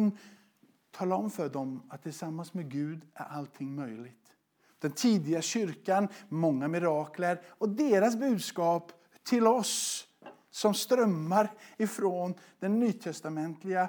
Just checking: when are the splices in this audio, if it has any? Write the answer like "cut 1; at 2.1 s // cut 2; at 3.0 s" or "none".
none